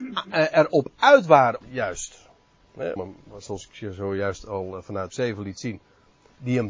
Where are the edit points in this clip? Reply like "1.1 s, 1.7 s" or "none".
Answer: 1.6 s, 3.0 s, 5.1 s